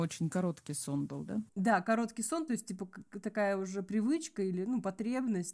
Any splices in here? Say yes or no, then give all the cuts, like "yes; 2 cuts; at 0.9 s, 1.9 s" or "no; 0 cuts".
yes; 1 cut; at 1.5 s